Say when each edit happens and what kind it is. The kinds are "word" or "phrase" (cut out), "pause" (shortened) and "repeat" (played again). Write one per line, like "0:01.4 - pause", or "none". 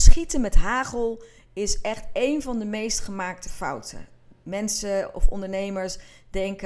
none